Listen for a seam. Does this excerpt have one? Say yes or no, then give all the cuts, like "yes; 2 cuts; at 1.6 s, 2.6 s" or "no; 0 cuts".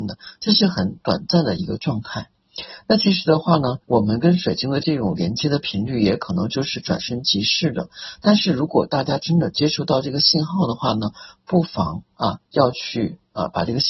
yes; 2 cuts; at 3.8 s, 12.4 s